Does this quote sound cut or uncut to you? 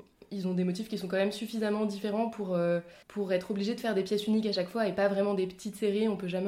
cut